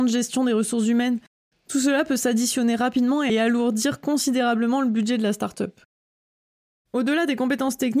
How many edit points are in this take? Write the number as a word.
zero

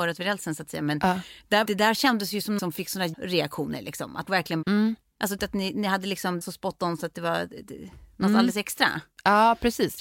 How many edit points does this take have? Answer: seven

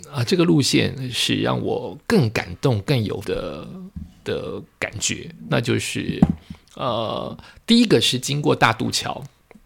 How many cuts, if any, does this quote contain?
one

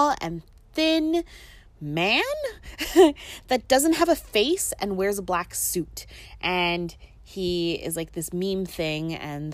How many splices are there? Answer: zero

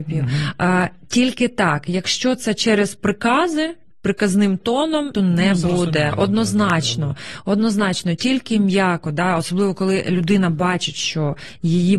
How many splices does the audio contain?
one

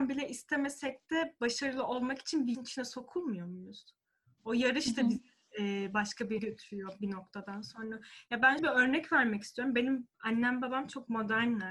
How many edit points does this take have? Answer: three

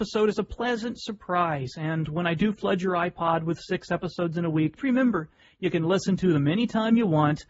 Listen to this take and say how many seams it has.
one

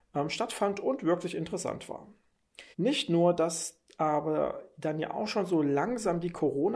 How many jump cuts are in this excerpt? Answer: one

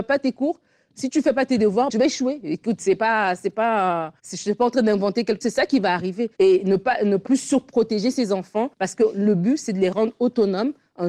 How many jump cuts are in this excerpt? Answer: six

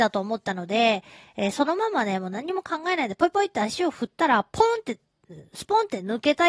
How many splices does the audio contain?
zero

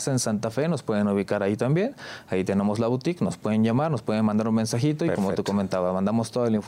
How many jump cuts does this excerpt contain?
zero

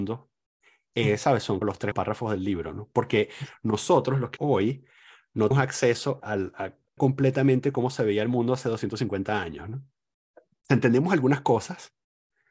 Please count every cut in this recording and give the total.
six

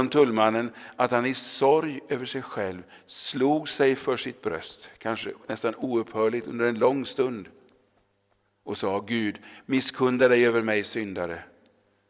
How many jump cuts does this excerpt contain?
zero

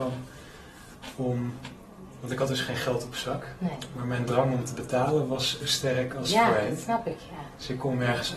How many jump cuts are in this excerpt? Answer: one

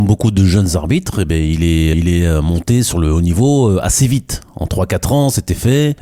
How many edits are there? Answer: one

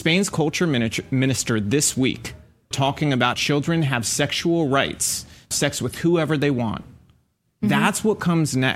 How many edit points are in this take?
three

